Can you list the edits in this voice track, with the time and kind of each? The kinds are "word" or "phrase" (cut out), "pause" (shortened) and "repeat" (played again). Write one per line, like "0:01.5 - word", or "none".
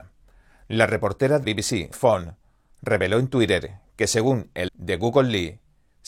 0:01.4 - word
0:01.9 - word
0:04.7 - word

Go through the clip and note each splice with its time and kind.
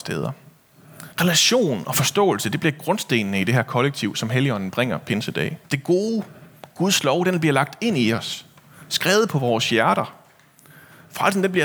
0:01.1 - pause
0:05.6 - pause

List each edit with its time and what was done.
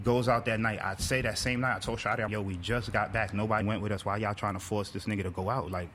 0:02.3 - word
0:03.6 - word

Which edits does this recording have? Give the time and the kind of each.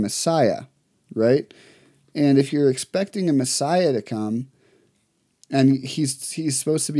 none

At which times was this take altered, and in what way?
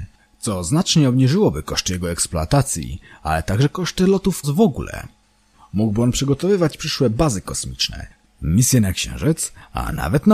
0:04.4 - word

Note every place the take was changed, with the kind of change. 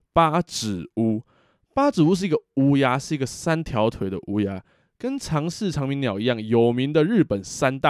none

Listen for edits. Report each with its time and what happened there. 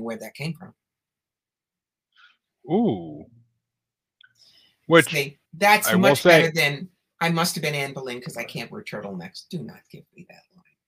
0:05.5 - pause

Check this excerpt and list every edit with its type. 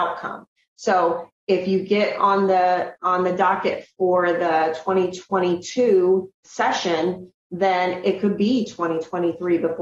0:06.3 - pause

